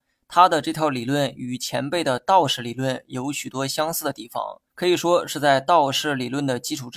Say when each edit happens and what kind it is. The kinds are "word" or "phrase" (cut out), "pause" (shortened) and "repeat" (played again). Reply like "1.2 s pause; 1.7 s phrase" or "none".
4.7 s pause